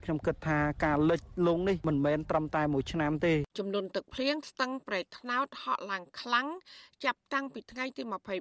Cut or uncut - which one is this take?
cut